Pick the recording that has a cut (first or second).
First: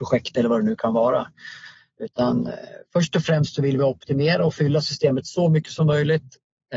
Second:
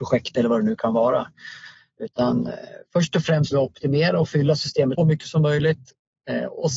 second